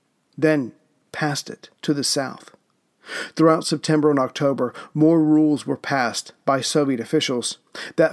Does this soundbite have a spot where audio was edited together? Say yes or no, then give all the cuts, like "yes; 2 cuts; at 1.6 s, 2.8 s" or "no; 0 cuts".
yes; 1 cut; at 1.8 s